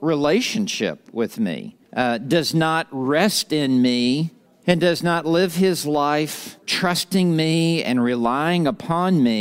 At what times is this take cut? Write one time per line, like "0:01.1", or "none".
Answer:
0:01.8
0:04.5
0:06.6